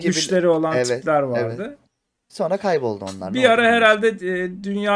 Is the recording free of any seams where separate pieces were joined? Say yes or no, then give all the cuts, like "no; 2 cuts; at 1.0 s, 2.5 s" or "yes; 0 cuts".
yes; 0 cuts